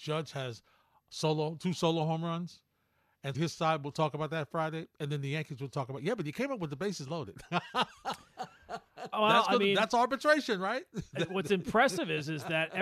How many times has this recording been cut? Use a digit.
2